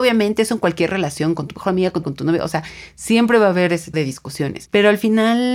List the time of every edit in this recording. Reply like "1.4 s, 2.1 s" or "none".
2.0 s, 3.9 s